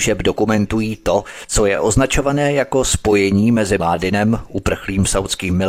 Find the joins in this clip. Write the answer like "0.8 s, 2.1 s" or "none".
3.8 s